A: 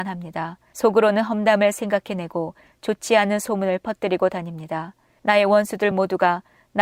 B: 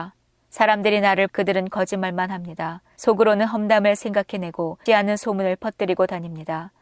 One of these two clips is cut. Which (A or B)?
B